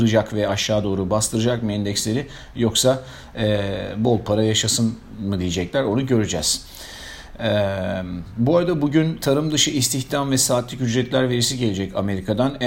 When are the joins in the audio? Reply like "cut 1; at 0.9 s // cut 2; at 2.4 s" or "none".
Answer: none